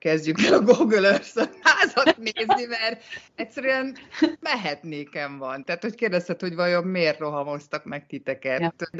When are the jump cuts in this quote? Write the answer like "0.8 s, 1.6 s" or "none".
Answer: 4.4 s